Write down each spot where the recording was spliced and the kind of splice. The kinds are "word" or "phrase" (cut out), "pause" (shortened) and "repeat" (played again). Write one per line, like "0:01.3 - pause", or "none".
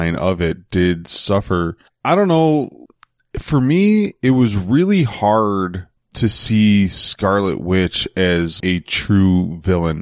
0:01.9 - word
0:08.6 - word